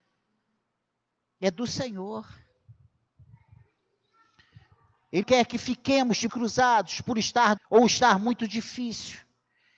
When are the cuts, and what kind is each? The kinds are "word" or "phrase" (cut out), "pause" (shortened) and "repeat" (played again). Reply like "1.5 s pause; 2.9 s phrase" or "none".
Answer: 5.2 s word; 6.3 s word; 7.6 s word